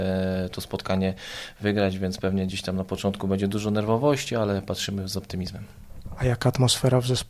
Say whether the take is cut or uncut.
uncut